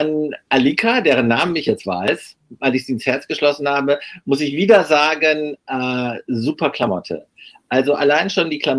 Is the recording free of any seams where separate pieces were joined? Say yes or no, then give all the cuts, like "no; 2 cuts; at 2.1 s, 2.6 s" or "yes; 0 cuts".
yes; 0 cuts